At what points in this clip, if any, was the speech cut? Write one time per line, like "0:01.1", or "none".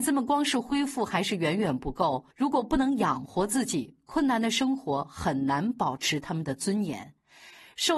0:02.3